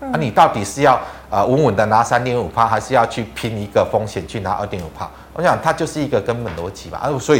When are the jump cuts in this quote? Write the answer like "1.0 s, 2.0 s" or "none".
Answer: none